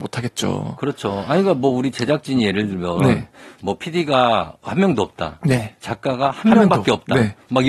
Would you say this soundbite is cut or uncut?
uncut